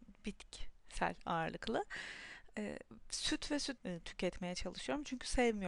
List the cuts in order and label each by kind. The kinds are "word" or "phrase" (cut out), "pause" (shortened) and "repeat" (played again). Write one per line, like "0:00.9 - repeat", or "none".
0:03.8 - phrase